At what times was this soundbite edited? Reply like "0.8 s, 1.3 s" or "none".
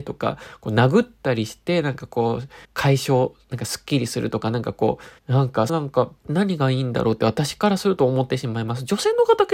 2.6 s, 5.2 s, 5.7 s, 6.2 s